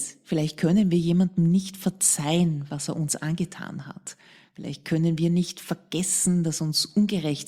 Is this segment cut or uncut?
uncut